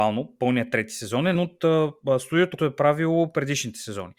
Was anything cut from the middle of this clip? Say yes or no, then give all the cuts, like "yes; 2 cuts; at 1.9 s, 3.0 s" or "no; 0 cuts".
yes; 2 cuts; at 1.3 s, 2.6 s